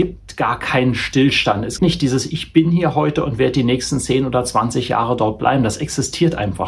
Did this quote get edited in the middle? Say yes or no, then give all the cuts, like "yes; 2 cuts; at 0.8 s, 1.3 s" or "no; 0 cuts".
yes; 1 cut; at 1.8 s